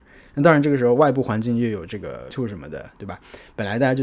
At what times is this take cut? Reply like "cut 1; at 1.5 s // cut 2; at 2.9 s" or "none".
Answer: cut 1; at 2.3 s